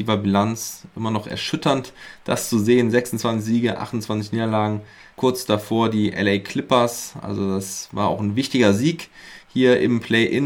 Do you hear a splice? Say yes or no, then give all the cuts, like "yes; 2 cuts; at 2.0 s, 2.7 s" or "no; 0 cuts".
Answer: no; 0 cuts